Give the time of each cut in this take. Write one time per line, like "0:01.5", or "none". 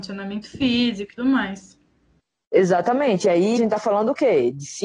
0:01.2
0:03.6